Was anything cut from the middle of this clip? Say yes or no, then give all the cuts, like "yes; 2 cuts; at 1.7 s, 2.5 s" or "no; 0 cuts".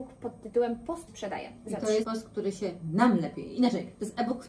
yes; 2 cuts; at 1.1 s, 2.0 s